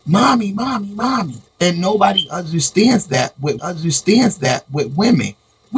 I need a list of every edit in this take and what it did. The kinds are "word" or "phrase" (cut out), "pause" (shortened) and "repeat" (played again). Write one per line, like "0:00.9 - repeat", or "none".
0:01.5 - pause
0:03.6 - repeat